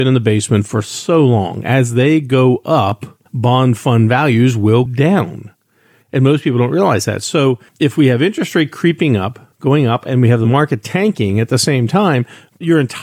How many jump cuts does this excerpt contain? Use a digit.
4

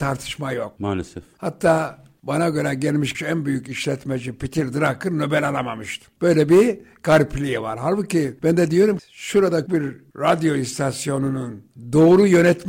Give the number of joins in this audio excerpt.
3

